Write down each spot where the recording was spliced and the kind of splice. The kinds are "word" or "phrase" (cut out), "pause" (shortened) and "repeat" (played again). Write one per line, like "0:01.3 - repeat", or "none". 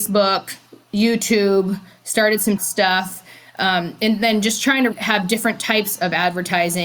0:02.6 - word
0:04.9 - word